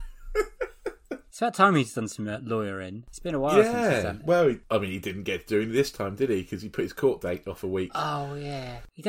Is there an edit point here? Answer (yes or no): no